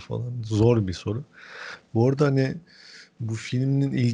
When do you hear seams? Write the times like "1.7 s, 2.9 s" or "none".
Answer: none

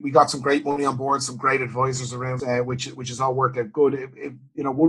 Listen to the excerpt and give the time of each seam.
2.4 s

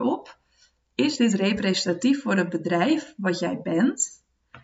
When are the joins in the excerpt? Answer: none

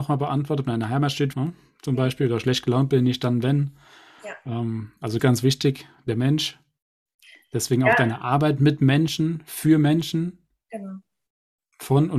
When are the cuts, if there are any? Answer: 1.3 s, 5.2 s

